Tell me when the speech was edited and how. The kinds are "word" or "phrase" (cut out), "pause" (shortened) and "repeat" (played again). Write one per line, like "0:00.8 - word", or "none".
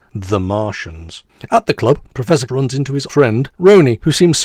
0:02.5 - word
0:03.1 - word